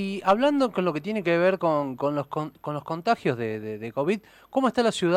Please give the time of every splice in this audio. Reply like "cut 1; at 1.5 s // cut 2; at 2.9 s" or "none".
none